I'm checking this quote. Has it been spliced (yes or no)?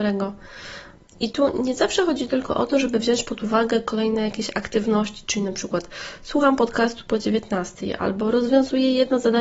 yes